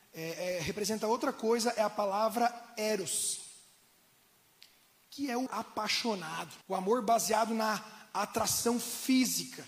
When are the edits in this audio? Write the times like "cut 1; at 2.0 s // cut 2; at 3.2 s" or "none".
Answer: cut 1; at 5.5 s // cut 2; at 6.6 s